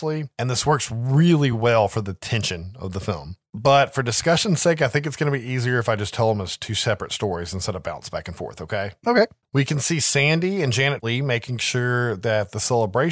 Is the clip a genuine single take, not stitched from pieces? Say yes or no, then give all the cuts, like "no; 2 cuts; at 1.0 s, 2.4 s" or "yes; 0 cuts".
yes; 0 cuts